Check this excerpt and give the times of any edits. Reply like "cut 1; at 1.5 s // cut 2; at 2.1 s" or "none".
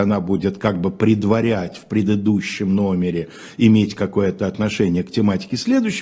none